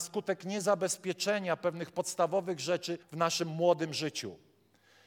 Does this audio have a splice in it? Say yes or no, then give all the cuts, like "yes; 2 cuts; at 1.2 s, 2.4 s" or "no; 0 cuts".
yes; 1 cut; at 3.0 s